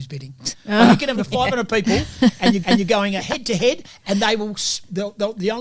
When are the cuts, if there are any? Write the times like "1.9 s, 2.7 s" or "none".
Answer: 1.2 s, 2.6 s

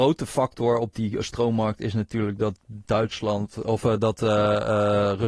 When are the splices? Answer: none

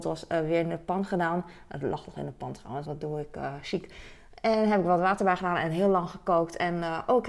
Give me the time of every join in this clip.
2.9 s

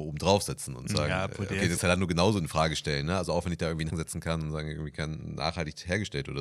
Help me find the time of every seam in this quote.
1.8 s, 3.9 s

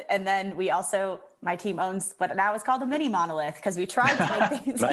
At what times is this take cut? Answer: none

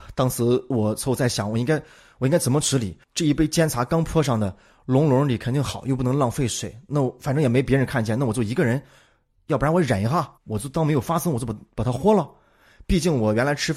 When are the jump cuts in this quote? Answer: 3.0 s, 10.4 s

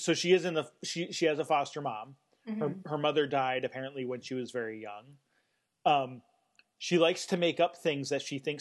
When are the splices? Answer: none

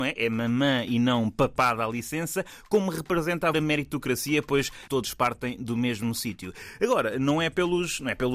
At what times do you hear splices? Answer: 3.5 s, 4.9 s

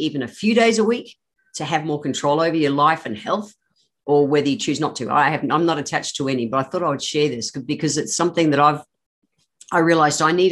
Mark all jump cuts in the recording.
none

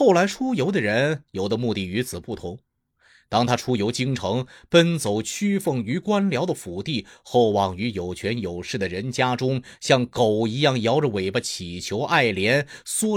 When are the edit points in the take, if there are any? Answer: none

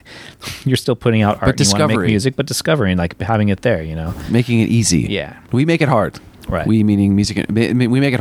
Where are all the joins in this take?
5.4 s

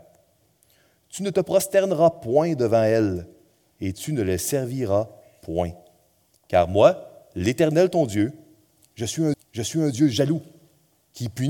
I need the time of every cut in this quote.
9.3 s

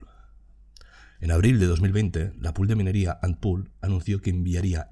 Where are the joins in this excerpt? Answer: none

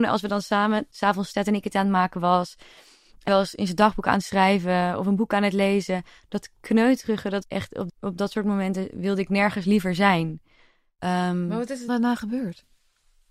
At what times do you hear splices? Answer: 1.3 s, 1.7 s, 3.3 s, 7.4 s, 7.9 s, 9.6 s, 11.9 s

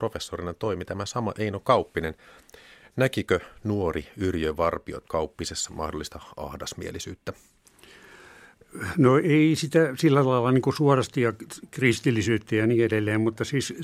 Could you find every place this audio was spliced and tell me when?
5.0 s

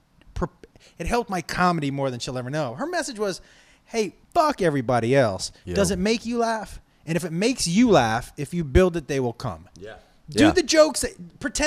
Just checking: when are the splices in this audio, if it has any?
4.2 s

